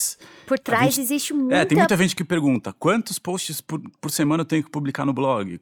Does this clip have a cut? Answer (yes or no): no